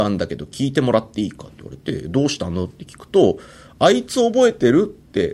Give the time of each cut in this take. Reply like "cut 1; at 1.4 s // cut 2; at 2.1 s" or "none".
none